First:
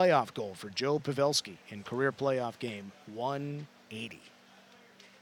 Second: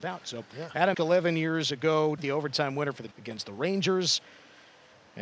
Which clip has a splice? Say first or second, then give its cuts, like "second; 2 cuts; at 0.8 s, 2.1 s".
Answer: second; 3 cuts; at 0.9 s, 2.2 s, 3.1 s